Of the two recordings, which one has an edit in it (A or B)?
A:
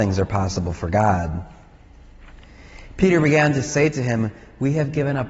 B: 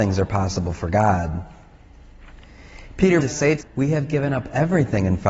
B